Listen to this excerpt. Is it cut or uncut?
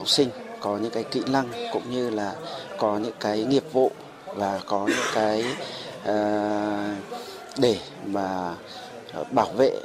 uncut